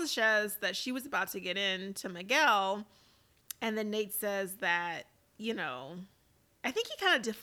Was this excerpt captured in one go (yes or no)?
yes